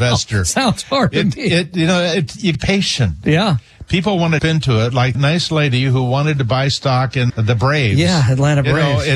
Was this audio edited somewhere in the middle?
yes; 4 cuts; at 2.5 s, 4.4 s, 5.1 s, 7.3 s

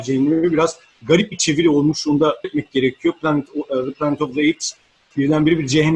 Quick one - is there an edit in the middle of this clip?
yes; 1 cut; at 2.4 s

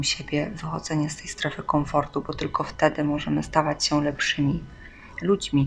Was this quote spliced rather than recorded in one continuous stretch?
no; 0 cuts

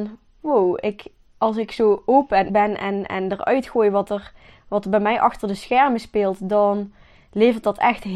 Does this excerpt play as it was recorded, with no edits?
no; 1 cut; at 2.5 s

